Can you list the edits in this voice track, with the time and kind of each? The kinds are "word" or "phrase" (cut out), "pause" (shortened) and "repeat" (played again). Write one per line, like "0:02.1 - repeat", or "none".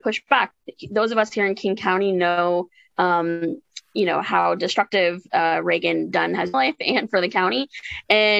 0:06.5 - phrase